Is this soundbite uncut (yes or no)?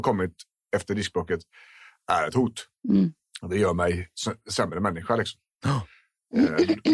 yes